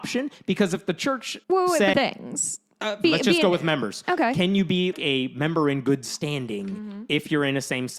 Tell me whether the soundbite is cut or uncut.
cut